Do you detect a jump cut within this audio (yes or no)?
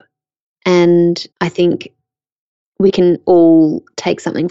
yes